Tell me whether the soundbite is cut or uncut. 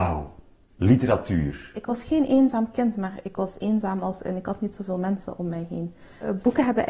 uncut